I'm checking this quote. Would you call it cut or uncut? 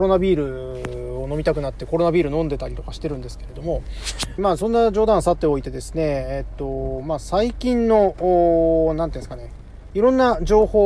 cut